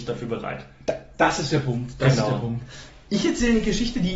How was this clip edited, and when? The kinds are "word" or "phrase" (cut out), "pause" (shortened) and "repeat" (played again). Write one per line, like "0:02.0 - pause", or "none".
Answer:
none